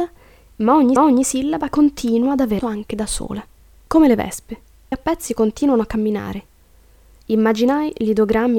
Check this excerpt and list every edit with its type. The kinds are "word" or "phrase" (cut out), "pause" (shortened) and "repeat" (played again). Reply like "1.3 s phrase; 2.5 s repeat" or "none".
1.0 s repeat; 2.6 s word; 3.6 s pause; 4.9 s phrase